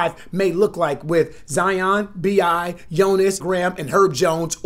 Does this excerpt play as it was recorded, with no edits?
no; 1 cut; at 3.4 s

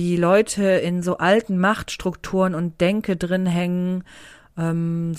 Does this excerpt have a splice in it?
no; 0 cuts

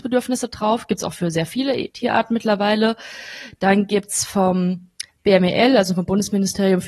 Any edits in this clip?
yes; 1 cut; at 5.1 s

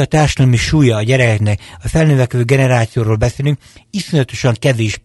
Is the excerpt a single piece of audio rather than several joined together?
yes; 0 cuts

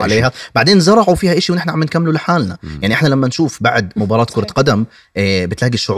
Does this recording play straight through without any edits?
yes; 0 cuts

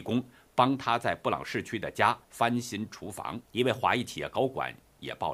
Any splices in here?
yes; 2 cuts; at 2.2 s, 3.4 s

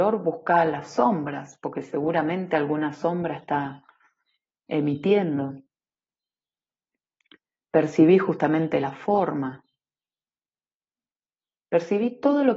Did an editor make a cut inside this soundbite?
no; 0 cuts

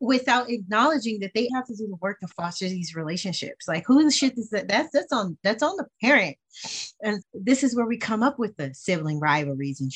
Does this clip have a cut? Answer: yes; 2 cuts; at 1.5 s, 7.2 s

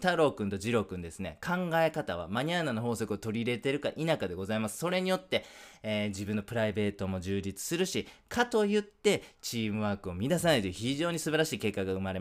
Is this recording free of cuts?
yes; 0 cuts

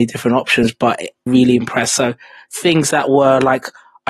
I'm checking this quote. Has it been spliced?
yes; 1 cut; at 1.3 s

